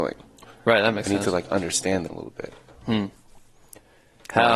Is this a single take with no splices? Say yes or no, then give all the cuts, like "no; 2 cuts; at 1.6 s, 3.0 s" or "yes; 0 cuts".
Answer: no; 1 cut; at 2.1 s